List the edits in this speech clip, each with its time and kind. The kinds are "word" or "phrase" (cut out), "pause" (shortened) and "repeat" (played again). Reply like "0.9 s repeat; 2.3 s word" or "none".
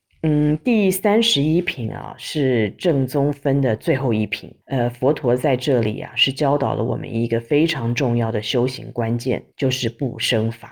4.6 s pause; 9.5 s pause